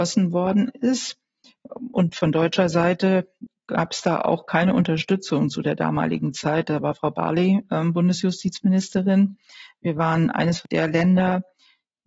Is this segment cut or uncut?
uncut